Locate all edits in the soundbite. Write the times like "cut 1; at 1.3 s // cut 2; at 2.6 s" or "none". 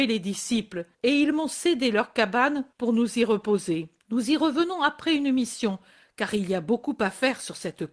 cut 1; at 0.9 s // cut 2; at 2.7 s // cut 3; at 4.0 s

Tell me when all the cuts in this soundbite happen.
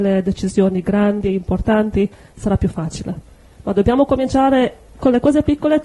none

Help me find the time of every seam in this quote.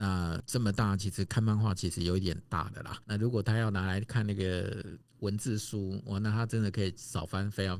cut 1; at 3.0 s // cut 2; at 5.0 s

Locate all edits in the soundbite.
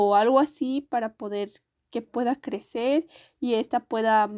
none

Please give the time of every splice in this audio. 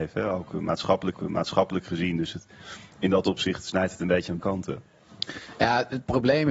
cut 1; at 1.1 s // cut 2; at 4.4 s

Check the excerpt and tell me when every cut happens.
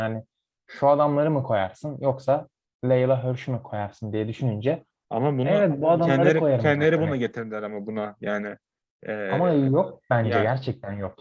none

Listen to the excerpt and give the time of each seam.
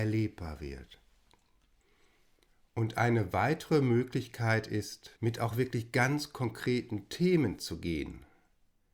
cut 1; at 1.8 s // cut 2; at 5.2 s

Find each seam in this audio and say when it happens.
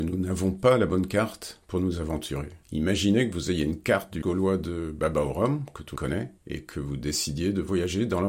cut 1; at 2.6 s // cut 2; at 4.2 s // cut 3; at 6.0 s // cut 4; at 6.4 s

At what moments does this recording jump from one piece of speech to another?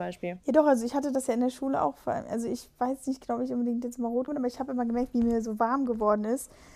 cut 1; at 4.3 s

